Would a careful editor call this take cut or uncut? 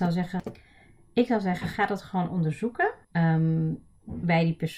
cut